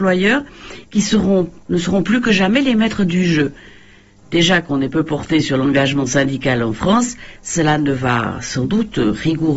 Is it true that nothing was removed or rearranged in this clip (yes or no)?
yes